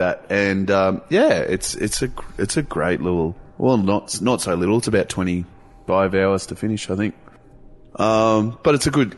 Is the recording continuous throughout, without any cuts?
yes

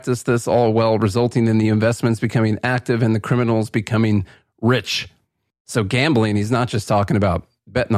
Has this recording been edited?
no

